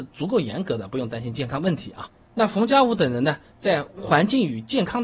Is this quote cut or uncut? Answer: uncut